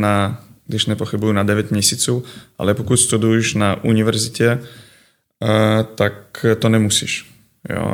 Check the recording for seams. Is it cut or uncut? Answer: uncut